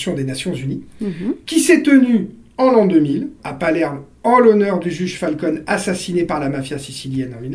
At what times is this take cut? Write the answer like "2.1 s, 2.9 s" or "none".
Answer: 3.4 s